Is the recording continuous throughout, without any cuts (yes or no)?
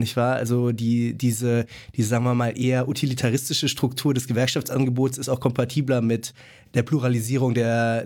yes